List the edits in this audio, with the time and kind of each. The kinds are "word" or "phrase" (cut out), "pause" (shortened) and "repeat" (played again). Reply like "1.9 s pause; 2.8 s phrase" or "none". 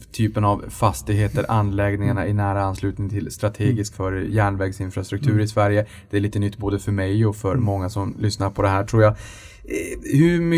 3.9 s word